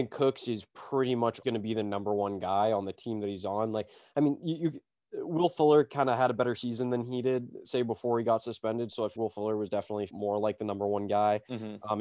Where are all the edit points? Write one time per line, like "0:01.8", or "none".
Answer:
0:01.4
0:07.6
0:09.1
0:10.1